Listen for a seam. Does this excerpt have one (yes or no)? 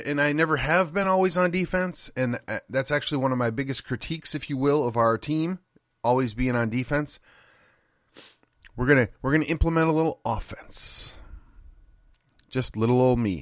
no